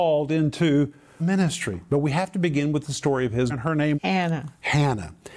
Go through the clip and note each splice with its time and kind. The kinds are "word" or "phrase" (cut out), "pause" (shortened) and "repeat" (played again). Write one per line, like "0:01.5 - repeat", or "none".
0:01.2 - word
0:03.5 - word
0:03.9 - word